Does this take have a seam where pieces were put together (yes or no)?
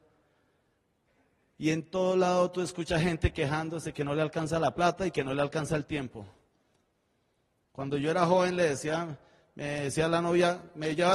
no